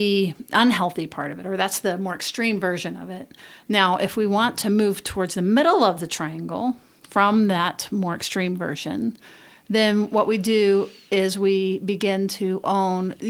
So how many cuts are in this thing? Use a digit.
0